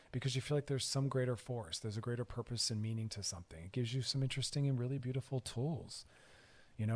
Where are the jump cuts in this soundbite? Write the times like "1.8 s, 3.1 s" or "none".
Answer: none